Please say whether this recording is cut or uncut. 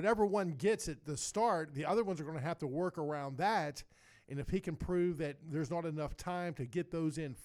uncut